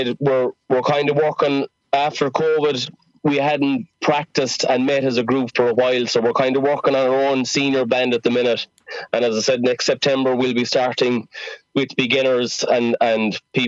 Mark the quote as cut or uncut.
uncut